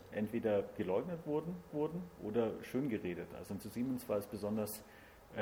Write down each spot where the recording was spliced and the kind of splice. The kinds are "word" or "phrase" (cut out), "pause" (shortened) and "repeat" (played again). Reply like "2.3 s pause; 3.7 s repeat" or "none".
1.7 s repeat; 3.6 s phrase